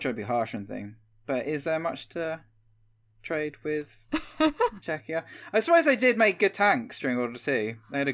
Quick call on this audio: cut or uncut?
uncut